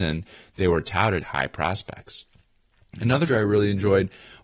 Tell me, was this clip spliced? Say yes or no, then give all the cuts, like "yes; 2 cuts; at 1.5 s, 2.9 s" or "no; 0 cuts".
yes; 2 cuts; at 1.2 s, 3.3 s